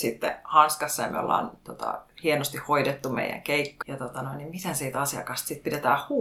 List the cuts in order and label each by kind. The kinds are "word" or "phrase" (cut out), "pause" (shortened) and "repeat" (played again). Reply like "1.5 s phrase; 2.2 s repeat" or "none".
3.8 s word